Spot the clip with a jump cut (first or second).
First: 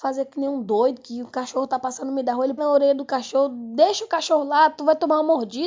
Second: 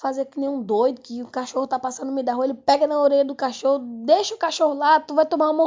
first